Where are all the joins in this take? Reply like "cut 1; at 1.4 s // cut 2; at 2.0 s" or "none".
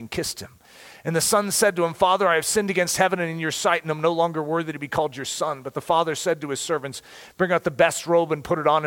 none